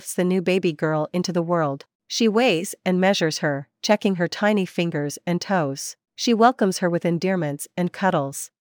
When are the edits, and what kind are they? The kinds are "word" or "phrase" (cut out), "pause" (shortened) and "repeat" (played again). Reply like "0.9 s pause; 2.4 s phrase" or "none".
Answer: 1.9 s pause; 6.0 s pause